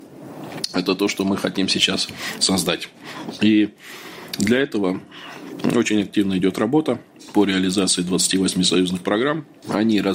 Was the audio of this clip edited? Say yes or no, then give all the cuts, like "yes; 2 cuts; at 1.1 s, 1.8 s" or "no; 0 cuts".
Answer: no; 0 cuts